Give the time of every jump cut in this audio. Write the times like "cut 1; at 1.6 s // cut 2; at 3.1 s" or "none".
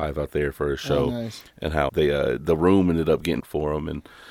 cut 1; at 1.9 s // cut 2; at 3.4 s